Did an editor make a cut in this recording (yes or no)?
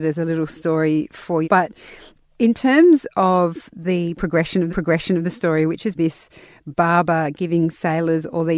yes